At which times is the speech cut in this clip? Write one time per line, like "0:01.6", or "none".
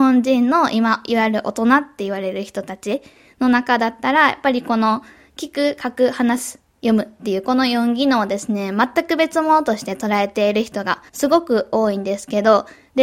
0:11.1

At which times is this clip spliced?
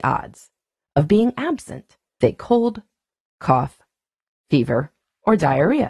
0:02.2

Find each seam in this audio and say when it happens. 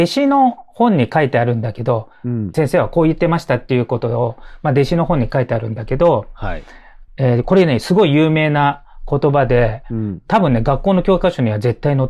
0:02.5
0:07.1

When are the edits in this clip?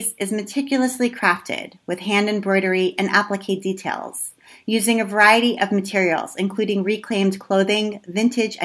none

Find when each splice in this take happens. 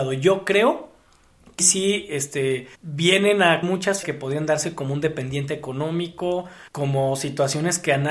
0:01.6
0:02.7
0:03.6
0:04.0
0:06.7

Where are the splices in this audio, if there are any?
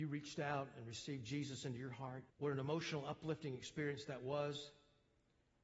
0:02.3

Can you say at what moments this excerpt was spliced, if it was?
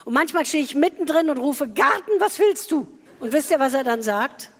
0:03.1

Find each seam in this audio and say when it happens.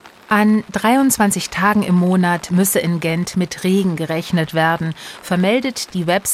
none

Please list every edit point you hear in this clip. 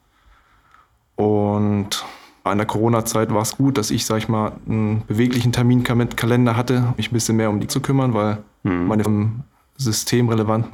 0:02.5
0:03.5
0:07.0
0:07.7
0:09.0

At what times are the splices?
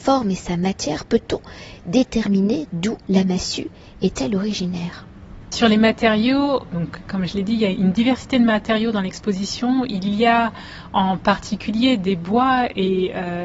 0:03.0
0:06.7
0:07.7

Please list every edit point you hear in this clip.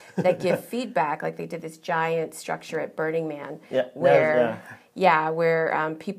none

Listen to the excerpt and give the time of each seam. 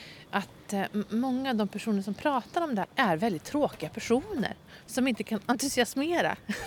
0:02.8

